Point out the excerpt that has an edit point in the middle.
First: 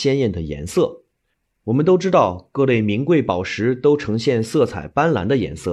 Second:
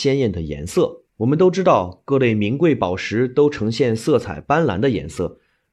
second; 1 cut; at 1.1 s

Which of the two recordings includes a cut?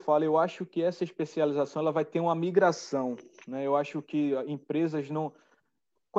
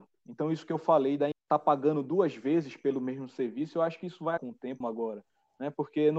second; 3 cuts; at 1.3 s, 4.4 s, 4.8 s

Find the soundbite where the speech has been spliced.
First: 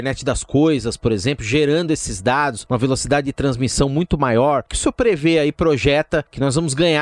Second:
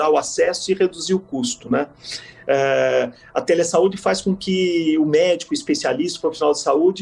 first; 1 cut; at 4.7 s

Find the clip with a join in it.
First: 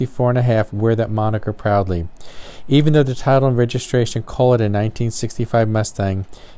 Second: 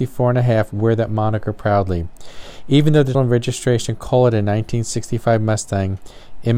second; 1 cut; at 3.1 s

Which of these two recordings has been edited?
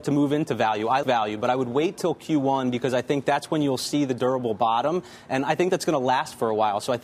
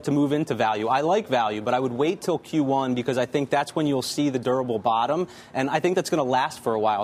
first; 1 cut; at 1.0 s

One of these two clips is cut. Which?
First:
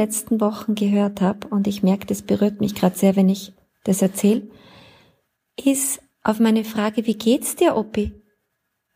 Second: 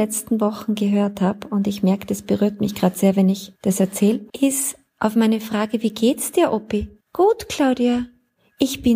second; 3 cuts; at 3.6 s, 4.3 s, 7.0 s

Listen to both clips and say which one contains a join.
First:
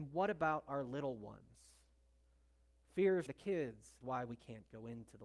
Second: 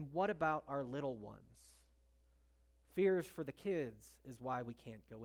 first; 2 cuts; at 3.3 s, 4.0 s

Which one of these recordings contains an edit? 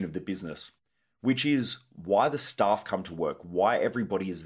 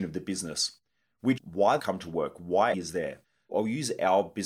second; 3 cuts; at 1.4 s, 1.8 s, 2.7 s

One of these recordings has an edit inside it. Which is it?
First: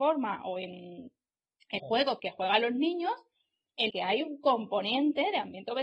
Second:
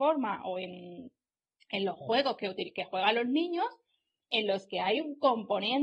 first; 3 cuts; at 1.8 s, 2.2 s, 3.9 s

